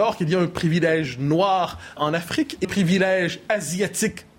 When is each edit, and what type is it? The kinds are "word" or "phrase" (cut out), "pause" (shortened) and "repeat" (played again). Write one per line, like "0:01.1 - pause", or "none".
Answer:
0:02.0 - word
0:02.6 - word